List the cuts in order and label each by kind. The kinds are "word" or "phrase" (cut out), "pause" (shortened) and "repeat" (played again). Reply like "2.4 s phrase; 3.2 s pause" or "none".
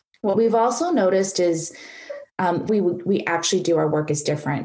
2.7 s word